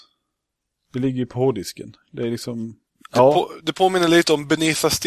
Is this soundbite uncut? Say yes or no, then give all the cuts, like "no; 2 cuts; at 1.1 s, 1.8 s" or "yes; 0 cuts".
no; 1 cut; at 2.9 s